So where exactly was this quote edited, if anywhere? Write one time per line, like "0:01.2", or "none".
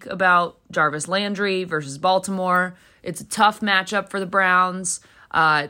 none